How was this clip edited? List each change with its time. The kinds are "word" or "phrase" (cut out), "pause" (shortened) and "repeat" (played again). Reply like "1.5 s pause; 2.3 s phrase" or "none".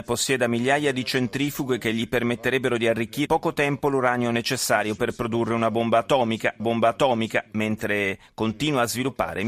3.3 s word; 6.6 s repeat